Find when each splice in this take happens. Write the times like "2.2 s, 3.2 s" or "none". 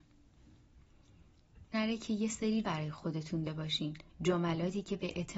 1.7 s, 2.6 s, 3.5 s, 4.1 s